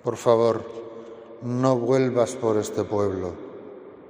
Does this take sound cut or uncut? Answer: uncut